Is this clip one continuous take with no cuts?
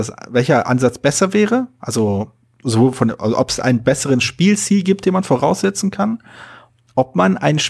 yes; 0 cuts

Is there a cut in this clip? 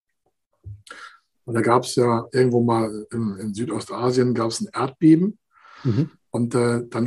no; 0 cuts

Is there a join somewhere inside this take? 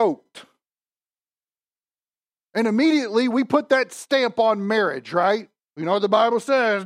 no; 0 cuts

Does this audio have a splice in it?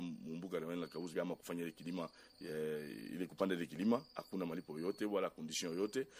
yes; 1 cut; at 1.1 s

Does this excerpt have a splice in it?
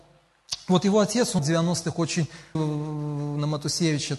yes; 2 cuts; at 1.4 s, 2.5 s

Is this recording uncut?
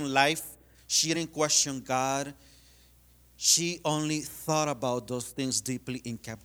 yes; 0 cuts

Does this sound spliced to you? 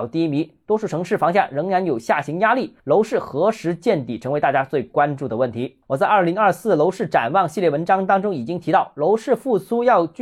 yes; 2 cuts; at 2.8 s, 5.8 s

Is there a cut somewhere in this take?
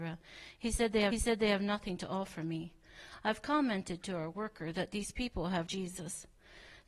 yes; 2 cuts; at 1.1 s, 5.7 s

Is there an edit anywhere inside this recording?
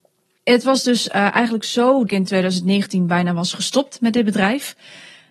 yes; 1 cut; at 2.1 s

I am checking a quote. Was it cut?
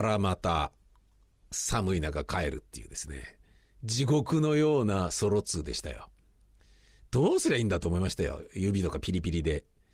no; 0 cuts

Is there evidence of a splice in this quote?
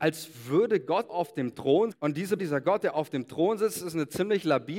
yes; 3 cuts; at 1.1 s, 1.9 s, 2.4 s

